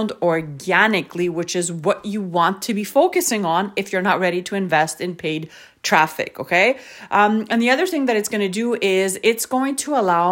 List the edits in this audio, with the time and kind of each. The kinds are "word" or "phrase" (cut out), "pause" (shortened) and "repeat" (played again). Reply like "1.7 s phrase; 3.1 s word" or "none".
none

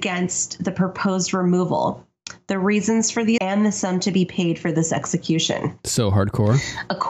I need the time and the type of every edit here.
3.4 s word

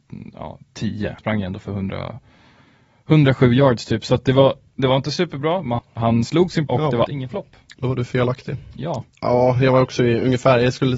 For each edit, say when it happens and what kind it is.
1.2 s word; 5.8 s word; 6.7 s word; 7.0 s word

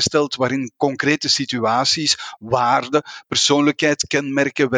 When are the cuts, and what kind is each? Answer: none

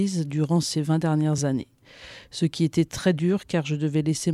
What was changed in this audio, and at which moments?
none

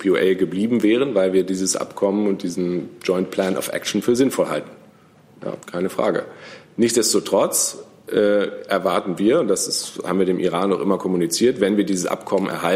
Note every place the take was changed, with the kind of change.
5.6 s pause

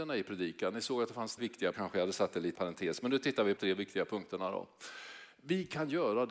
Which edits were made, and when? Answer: 1.4 s word; 1.7 s word; 2.6 s word; 3.6 s word

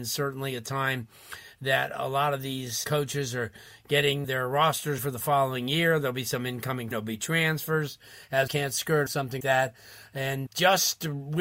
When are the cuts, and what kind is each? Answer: 2.8 s word; 4.2 s word; 5.0 s word; 6.9 s word; 8.5 s word; 9.1 s word; 9.4 s word; 10.5 s word

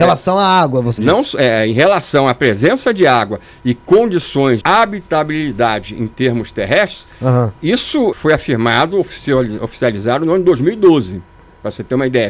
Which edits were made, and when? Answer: 1.0 s word; 4.6 s word; 8.1 s word

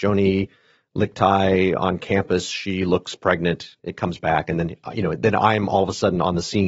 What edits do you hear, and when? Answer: 3.8 s pause

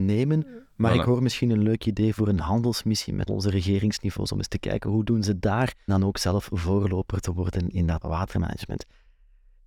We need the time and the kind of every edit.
3.3 s word; 5.9 s word; 8.0 s word

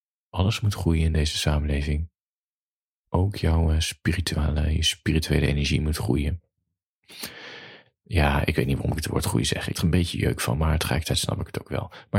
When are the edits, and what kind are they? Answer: 9.7 s word

